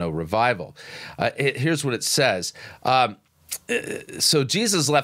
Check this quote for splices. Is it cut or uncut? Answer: uncut